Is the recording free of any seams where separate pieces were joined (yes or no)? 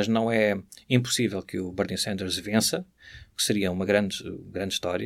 yes